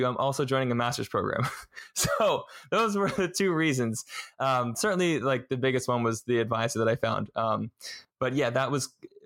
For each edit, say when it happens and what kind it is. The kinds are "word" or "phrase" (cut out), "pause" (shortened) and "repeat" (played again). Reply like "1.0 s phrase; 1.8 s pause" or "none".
none